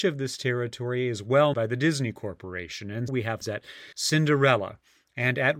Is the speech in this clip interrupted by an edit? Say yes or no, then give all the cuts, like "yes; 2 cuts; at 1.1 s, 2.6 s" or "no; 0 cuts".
yes; 4 cuts; at 1.5 s, 3.1 s, 3.4 s, 3.9 s